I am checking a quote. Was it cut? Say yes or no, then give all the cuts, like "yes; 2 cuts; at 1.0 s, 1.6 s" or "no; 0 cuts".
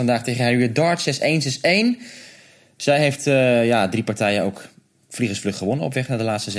no; 0 cuts